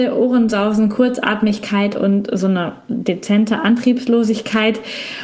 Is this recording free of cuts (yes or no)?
yes